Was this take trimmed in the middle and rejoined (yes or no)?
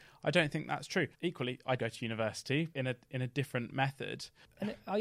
yes